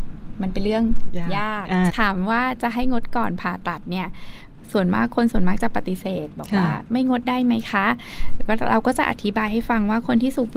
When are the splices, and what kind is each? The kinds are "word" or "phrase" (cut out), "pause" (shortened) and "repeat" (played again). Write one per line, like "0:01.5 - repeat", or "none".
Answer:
0:01.9 - phrase